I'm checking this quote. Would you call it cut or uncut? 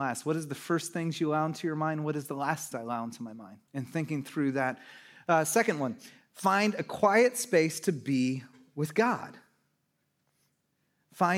cut